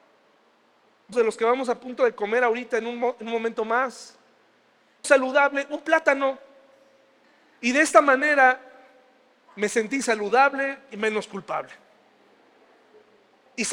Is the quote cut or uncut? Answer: cut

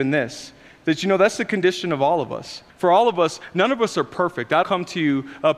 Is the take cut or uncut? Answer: cut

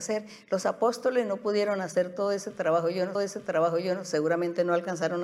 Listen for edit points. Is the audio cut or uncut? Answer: cut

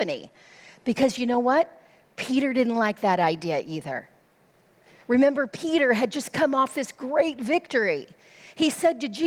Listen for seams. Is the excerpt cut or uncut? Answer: uncut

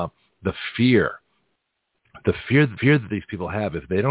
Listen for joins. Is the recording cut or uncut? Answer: cut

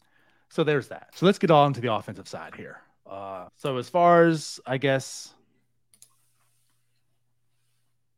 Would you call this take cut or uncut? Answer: cut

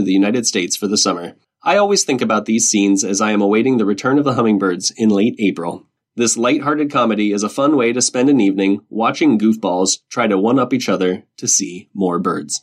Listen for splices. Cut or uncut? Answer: cut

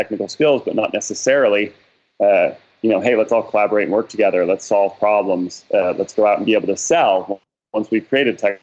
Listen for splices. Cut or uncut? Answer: uncut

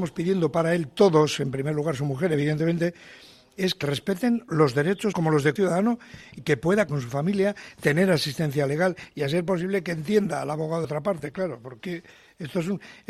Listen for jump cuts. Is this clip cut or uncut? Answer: cut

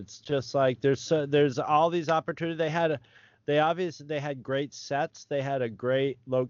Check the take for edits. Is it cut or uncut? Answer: uncut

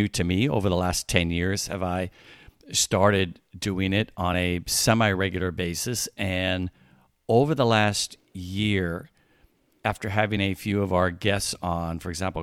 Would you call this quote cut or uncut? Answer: uncut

